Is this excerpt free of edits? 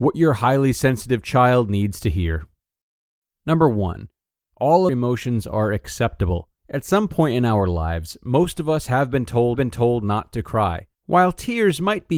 no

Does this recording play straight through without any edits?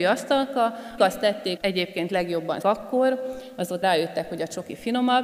no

